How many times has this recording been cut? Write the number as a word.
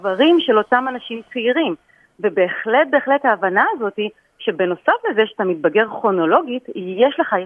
zero